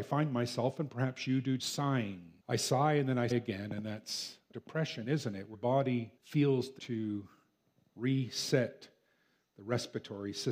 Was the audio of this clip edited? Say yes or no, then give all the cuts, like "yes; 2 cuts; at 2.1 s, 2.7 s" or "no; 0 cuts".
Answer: yes; 7 cuts; at 1.6 s, 2.4 s, 3.3 s, 4.5 s, 5.5 s, 6.2 s, 6.8 s